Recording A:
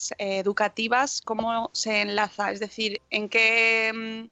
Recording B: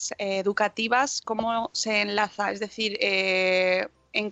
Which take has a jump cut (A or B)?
A